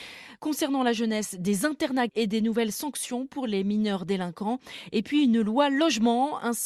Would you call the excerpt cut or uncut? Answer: cut